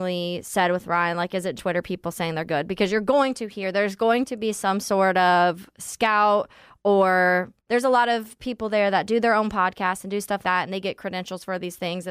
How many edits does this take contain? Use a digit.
3